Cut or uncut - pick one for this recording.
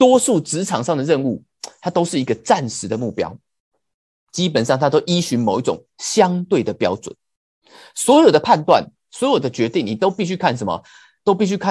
uncut